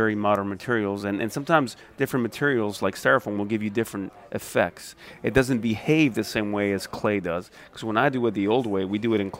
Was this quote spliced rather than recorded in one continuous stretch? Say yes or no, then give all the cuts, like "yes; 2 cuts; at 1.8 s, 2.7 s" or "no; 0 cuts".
no; 0 cuts